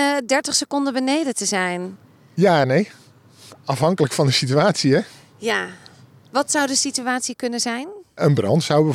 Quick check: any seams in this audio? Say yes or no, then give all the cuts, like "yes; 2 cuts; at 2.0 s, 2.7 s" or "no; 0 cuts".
no; 0 cuts